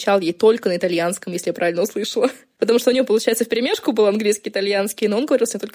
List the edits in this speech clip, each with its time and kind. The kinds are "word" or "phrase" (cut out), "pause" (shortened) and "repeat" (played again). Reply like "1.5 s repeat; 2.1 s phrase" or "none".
none